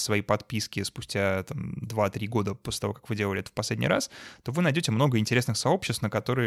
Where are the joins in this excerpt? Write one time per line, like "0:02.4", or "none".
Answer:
none